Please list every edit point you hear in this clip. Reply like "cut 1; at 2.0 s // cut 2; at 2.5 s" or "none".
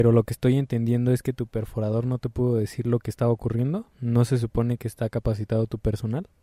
cut 1; at 3.9 s